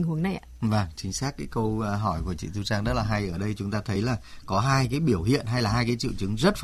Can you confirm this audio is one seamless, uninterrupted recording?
yes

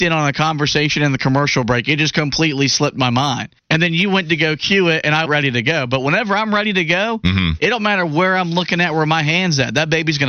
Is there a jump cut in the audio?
yes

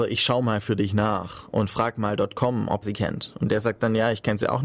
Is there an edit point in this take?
yes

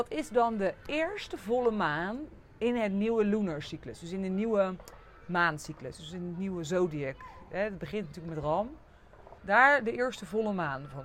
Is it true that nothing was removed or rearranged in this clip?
no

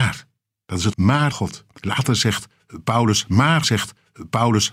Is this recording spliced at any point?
yes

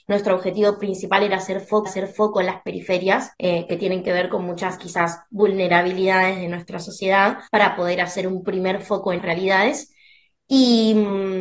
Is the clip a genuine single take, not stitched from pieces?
no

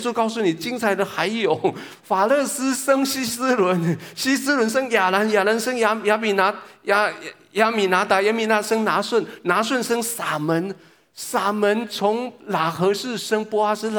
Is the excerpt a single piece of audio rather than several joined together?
yes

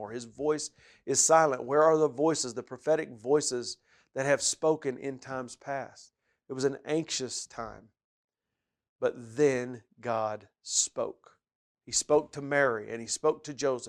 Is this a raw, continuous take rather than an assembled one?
yes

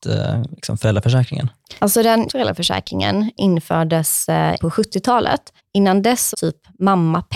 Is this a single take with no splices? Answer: no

